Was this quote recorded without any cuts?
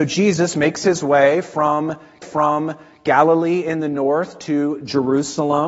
no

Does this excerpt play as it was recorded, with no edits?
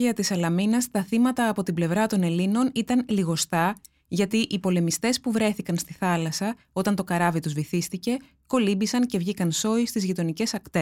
yes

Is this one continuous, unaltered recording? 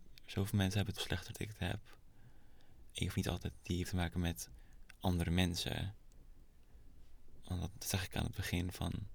no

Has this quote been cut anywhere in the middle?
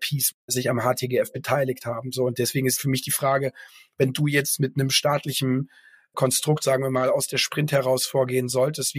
no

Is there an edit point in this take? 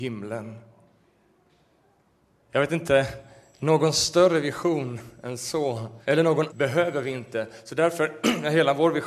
yes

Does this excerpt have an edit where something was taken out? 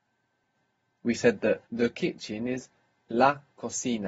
yes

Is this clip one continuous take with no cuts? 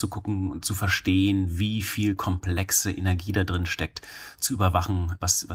yes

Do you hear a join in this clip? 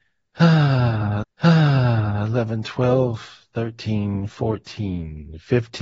yes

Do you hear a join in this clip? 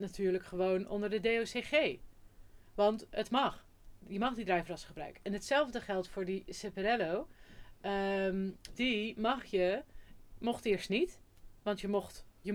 yes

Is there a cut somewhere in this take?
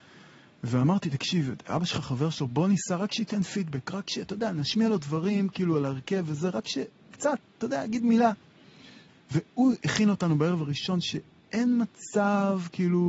no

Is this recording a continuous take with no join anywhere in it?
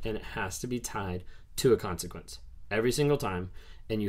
yes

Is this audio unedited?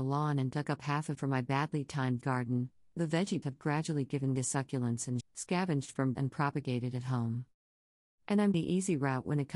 no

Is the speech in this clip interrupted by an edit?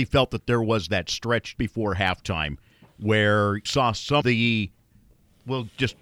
yes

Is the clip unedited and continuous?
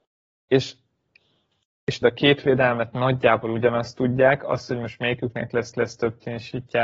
no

